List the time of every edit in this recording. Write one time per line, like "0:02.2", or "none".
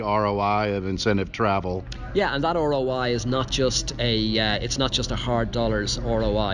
none